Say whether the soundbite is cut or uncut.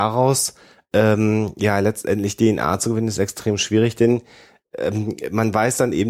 uncut